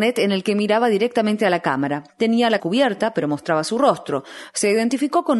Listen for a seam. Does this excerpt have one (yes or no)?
yes